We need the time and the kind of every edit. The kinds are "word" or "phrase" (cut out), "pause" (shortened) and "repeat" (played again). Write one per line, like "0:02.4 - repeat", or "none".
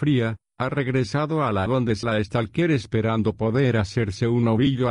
0:01.7 - word
0:02.0 - word